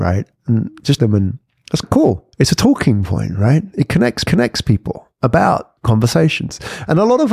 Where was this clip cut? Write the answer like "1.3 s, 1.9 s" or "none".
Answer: 1.0 s, 1.8 s, 2.3 s, 4.2 s, 5.8 s